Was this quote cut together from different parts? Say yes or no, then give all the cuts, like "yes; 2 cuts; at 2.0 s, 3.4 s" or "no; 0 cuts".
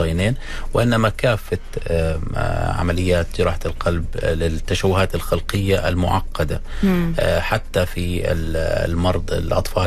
no; 0 cuts